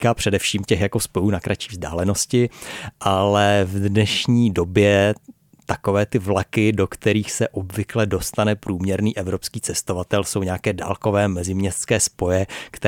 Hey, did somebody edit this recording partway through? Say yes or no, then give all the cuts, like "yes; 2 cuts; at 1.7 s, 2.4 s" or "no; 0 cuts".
no; 0 cuts